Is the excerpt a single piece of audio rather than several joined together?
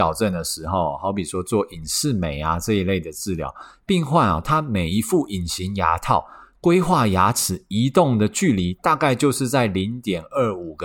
yes; 0 cuts

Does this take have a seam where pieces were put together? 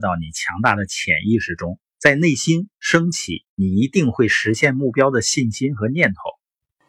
yes; 2 cuts; at 1.9 s, 3.5 s

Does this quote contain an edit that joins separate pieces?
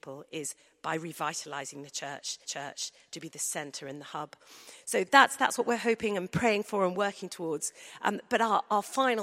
yes; 1 cut; at 2.4 s

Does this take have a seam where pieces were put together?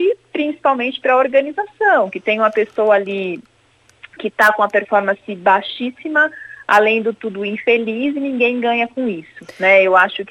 no; 0 cuts

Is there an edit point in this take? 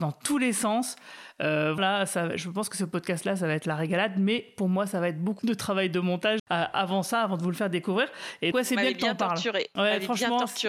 yes; 4 cuts; at 1.8 s, 5.4 s, 6.4 s, 8.5 s

